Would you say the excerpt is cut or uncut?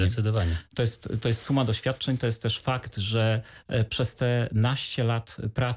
cut